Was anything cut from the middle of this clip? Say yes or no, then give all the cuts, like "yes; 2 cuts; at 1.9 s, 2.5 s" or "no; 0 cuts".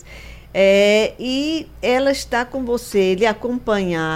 no; 0 cuts